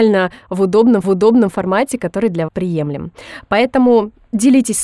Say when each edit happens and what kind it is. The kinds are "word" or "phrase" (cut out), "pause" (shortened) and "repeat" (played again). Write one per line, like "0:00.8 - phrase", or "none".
0:01.0 - repeat
0:02.5 - word